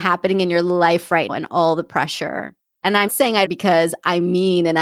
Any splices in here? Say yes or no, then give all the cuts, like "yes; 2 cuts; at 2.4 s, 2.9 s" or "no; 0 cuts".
yes; 3 cuts; at 1.3 s, 3.1 s, 3.4 s